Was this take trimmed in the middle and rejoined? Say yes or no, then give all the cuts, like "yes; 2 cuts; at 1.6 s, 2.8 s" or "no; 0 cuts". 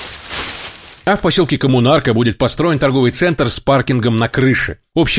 yes; 1 cut; at 1.0 s